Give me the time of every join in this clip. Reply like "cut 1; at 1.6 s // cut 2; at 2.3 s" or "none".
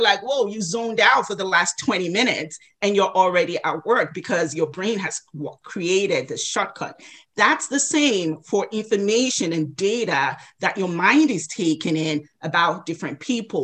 none